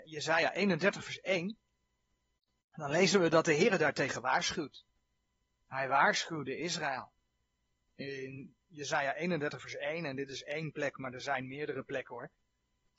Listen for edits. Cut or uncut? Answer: uncut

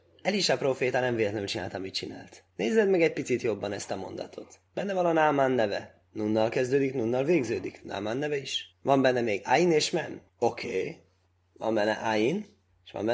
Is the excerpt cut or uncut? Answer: cut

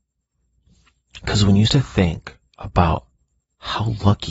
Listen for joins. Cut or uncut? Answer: cut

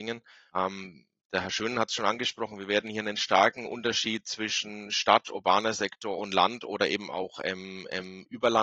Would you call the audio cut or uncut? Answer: uncut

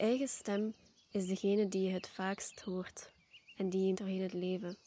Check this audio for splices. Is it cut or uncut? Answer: cut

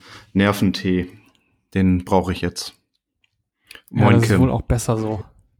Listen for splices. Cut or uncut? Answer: uncut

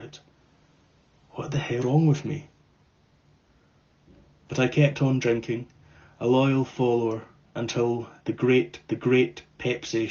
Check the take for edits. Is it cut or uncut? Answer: cut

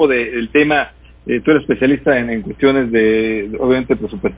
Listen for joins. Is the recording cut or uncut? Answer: uncut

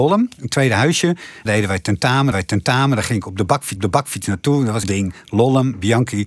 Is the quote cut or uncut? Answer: cut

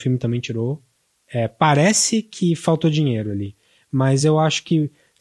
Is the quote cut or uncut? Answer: uncut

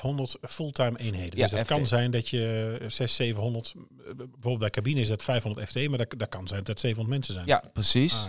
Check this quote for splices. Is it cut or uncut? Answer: uncut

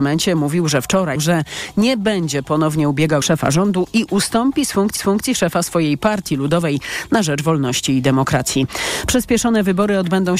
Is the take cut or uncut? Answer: cut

